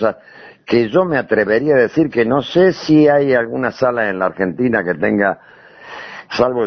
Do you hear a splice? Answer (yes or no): no